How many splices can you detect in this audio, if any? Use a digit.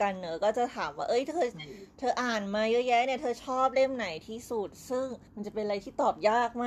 1